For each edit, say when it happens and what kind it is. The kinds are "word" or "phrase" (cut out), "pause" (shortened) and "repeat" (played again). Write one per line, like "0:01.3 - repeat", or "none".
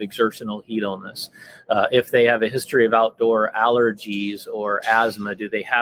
none